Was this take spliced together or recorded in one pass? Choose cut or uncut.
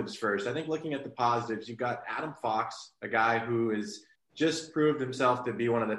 cut